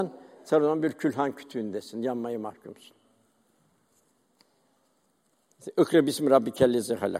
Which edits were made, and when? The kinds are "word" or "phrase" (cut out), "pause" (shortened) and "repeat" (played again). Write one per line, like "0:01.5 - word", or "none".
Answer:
none